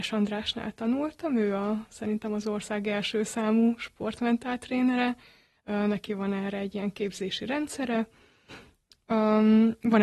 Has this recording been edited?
no; 0 cuts

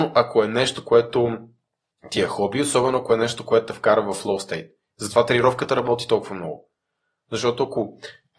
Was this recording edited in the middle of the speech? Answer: no; 0 cuts

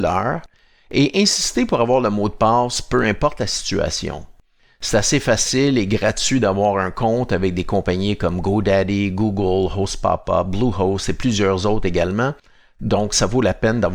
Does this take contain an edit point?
no; 0 cuts

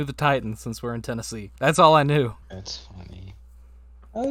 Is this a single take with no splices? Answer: no; 2 cuts; at 1.6 s, 2.4 s

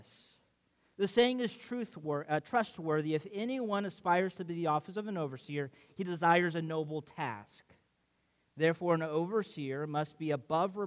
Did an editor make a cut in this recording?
no; 0 cuts

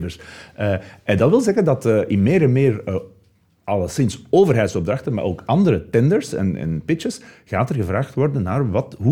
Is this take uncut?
yes; 0 cuts

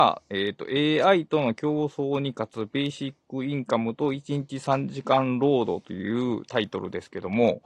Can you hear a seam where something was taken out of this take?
no; 0 cuts

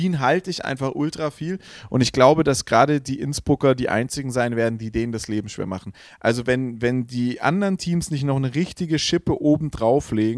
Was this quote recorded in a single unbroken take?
yes; 0 cuts

